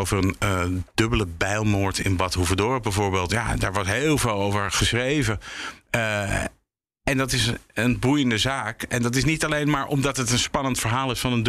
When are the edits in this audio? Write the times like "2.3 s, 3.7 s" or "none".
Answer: none